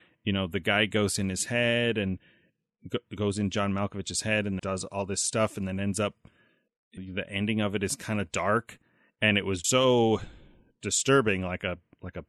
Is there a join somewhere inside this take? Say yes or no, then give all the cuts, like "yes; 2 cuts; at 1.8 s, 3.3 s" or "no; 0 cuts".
yes; 3 cuts; at 4.6 s, 7.0 s, 9.6 s